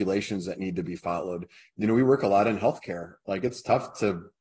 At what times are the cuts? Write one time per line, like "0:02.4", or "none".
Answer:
none

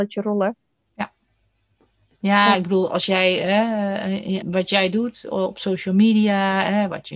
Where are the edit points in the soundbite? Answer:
0:04.4

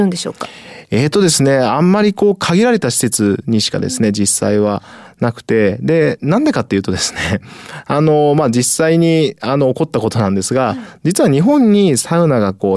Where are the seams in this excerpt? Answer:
none

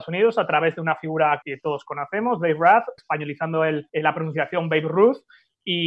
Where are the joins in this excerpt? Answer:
0:01.4
0:03.0
0:03.9

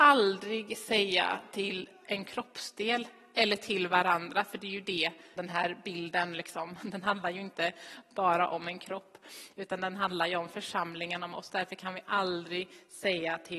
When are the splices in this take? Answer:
0:05.4
0:06.8

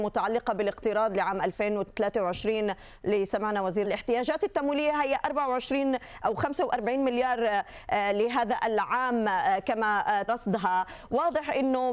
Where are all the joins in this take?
0:03.8
0:10.3

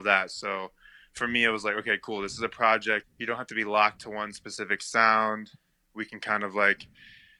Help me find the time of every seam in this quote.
0:03.0
0:04.0

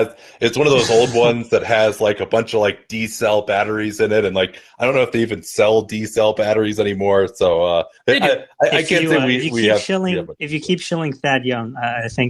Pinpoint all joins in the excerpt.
none

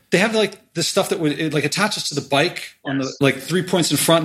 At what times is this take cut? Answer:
none

